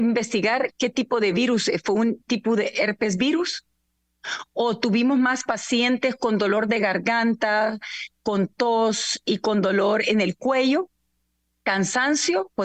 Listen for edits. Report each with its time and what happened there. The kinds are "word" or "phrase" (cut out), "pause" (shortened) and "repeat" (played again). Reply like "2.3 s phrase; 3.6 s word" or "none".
none